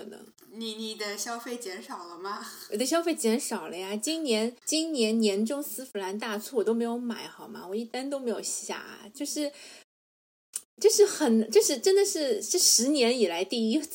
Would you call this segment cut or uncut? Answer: cut